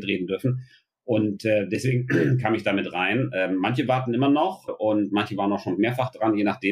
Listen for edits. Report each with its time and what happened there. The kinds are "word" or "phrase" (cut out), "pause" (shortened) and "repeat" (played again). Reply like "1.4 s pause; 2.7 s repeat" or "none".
4.7 s word